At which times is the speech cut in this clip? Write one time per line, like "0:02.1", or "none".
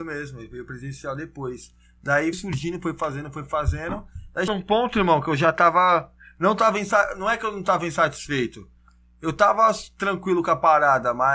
0:02.3
0:04.5

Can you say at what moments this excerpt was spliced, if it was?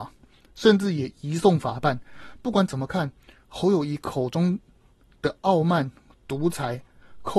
none

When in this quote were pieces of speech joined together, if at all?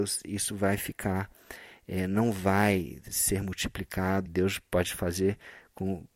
0:04.3

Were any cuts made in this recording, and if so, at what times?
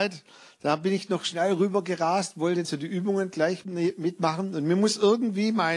0:02.6
0:03.6

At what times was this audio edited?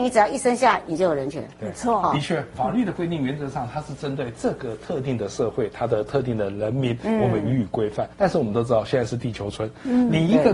0:08.1

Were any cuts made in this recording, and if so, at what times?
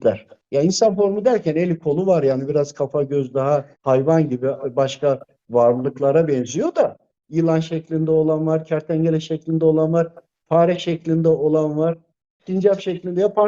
0:03.7

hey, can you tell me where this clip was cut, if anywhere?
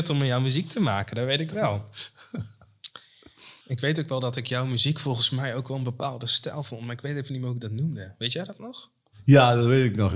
0:03.6

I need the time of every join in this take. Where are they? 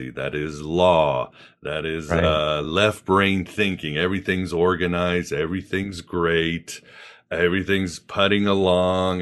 none

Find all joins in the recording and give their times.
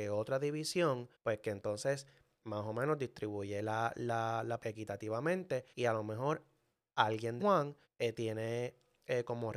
0:01.1
0:04.6
0:05.7
0:07.4
0:07.8

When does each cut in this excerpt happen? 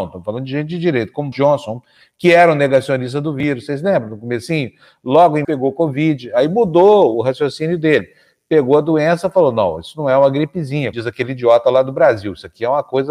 0:01.3
0:05.4
0:07.1
0:10.9

